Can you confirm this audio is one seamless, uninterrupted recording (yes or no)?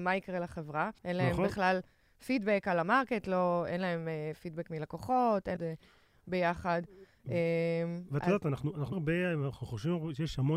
no